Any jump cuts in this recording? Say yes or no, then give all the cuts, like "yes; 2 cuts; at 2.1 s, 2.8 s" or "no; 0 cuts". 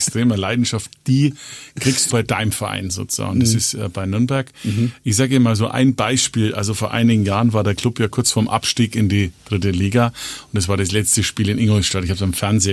yes; 1 cut; at 2.1 s